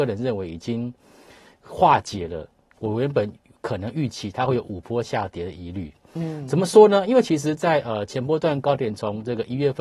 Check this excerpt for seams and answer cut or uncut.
uncut